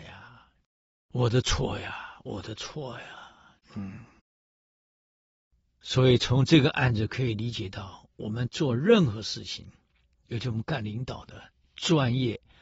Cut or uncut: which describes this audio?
cut